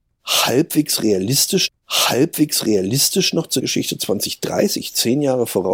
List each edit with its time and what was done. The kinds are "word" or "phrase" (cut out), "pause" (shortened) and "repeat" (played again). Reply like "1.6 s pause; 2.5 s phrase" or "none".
1.7 s repeat; 3.6 s word